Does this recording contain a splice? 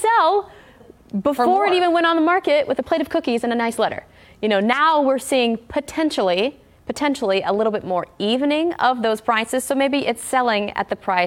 no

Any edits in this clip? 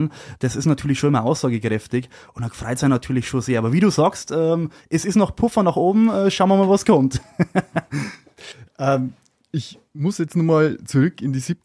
no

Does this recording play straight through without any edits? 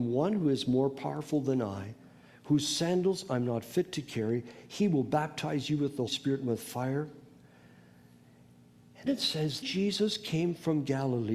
no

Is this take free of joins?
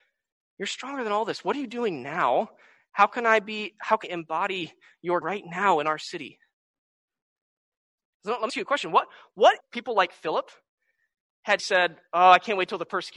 no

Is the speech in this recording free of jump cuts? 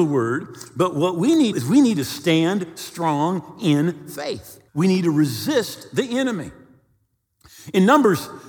no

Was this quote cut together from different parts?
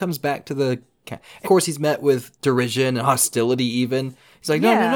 yes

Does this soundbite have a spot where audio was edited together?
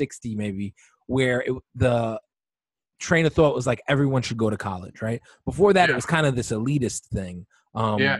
no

